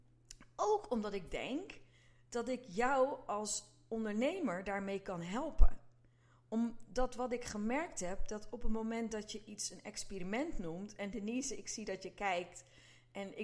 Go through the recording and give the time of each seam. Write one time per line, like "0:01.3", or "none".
none